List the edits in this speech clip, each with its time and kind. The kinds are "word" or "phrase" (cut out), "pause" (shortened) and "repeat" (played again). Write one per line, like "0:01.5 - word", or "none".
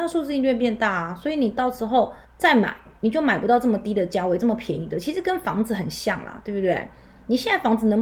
0:02.2 - pause